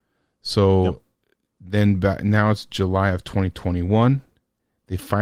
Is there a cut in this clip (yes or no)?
no